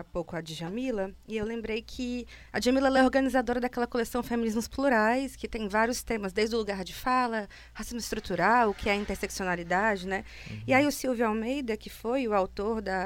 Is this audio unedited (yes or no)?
yes